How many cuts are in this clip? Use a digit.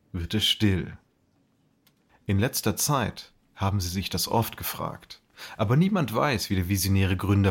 0